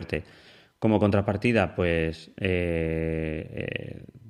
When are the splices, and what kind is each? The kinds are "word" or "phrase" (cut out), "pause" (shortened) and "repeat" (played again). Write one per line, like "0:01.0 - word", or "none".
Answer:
none

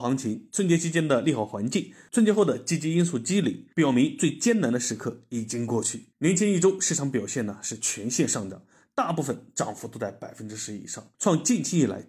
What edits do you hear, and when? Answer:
0:06.1 - pause
0:11.1 - pause

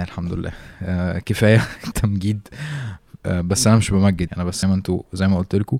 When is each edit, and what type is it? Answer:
0:01.9 - word
0:04.3 - word
0:04.6 - word

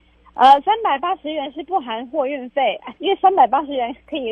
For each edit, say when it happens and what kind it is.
0:03.0 - pause

